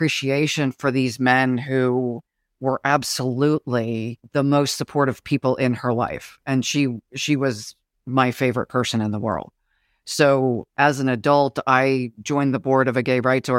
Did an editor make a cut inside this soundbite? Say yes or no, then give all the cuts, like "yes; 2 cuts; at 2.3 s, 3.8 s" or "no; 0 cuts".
no; 0 cuts